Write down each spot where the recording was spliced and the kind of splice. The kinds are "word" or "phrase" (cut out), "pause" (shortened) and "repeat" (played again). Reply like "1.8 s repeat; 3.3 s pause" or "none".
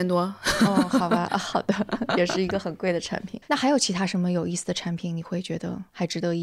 3.4 s pause